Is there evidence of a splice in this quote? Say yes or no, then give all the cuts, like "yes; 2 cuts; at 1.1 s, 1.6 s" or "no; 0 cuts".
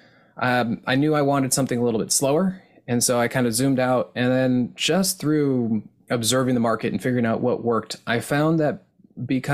no; 0 cuts